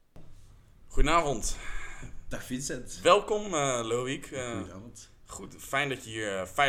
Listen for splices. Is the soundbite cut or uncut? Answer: uncut